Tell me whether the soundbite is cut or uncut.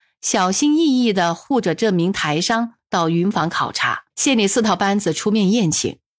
cut